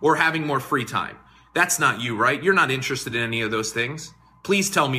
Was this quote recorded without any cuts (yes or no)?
yes